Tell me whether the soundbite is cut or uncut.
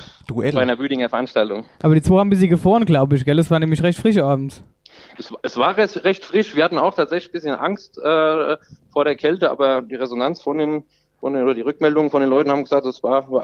uncut